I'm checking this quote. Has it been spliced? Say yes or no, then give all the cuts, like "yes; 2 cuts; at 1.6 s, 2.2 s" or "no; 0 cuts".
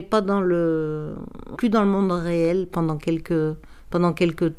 yes; 1 cut; at 1.5 s